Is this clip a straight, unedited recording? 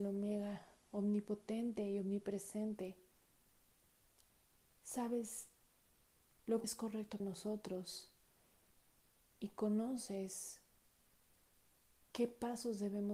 no; 2 cuts; at 6.6 s, 7.2 s

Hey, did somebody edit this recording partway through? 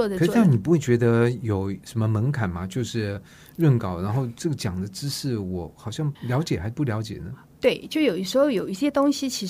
no; 0 cuts

